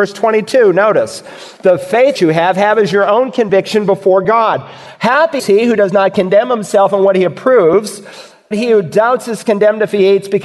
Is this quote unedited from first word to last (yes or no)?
no